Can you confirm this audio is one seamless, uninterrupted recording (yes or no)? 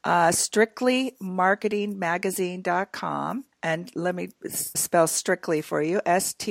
no